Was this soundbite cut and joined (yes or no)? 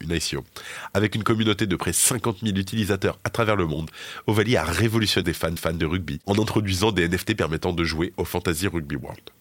yes